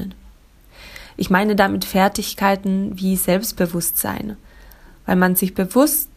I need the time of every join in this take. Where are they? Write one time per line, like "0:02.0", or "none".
none